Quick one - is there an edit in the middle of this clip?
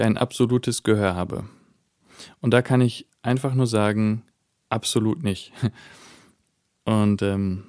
no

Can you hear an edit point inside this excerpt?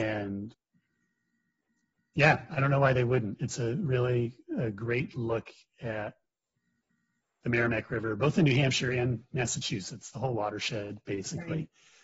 no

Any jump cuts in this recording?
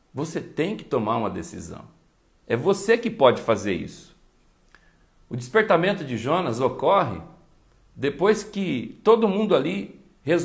no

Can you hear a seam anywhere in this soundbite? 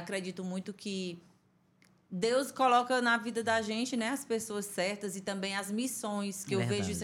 no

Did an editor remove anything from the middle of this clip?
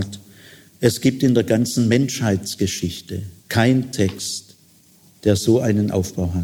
yes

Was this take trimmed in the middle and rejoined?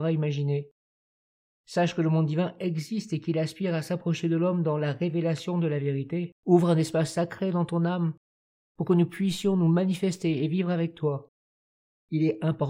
yes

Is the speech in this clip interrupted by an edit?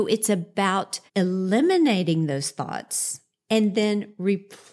yes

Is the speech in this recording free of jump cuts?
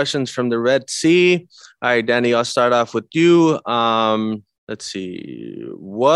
yes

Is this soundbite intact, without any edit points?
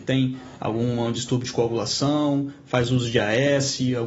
yes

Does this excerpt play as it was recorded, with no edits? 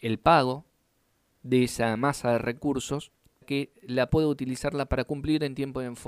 no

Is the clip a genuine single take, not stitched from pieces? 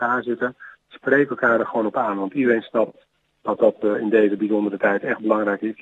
yes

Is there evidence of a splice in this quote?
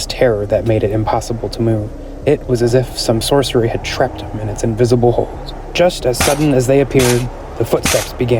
no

